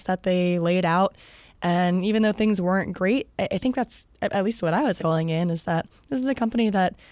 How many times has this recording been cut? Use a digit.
1